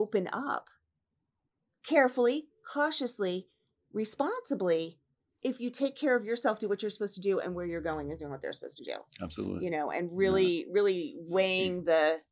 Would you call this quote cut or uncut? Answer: uncut